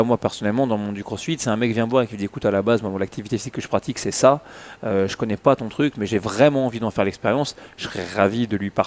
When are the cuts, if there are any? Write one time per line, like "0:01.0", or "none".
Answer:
none